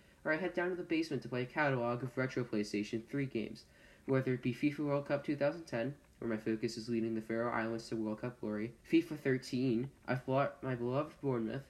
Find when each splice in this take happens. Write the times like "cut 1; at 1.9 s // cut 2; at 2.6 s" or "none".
cut 1; at 8.8 s